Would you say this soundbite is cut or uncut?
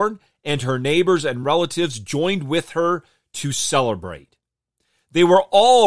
uncut